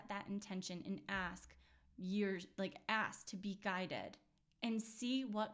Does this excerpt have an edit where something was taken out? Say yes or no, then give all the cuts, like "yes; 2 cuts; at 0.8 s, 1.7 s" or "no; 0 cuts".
no; 0 cuts